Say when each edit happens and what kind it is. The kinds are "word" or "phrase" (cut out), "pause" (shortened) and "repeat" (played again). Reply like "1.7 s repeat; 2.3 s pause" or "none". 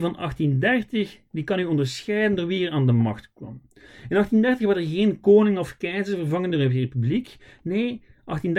none